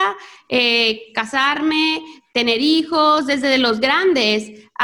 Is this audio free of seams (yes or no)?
yes